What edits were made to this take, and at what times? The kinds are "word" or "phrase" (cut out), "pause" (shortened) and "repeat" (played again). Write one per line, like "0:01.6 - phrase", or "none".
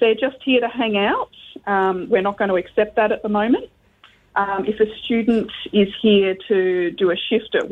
none

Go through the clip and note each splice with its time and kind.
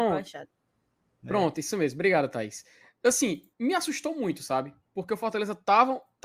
0:03.5 - pause

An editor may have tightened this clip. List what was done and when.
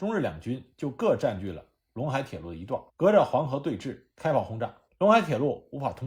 0:02.9 - pause
0:04.1 - pause
0:04.9 - pause

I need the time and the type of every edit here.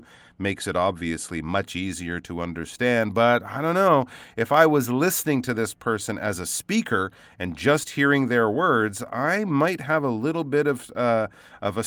none

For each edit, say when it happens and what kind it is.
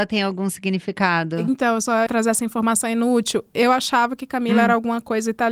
0:02.1 - word

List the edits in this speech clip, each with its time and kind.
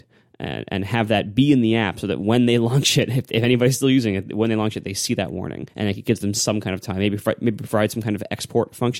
0:05.7 - pause

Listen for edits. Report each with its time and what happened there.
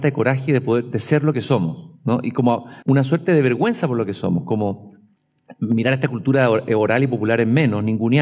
0:02.8 - pause

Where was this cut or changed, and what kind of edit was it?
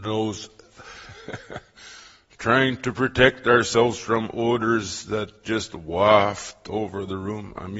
none

